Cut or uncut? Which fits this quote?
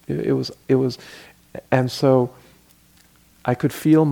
cut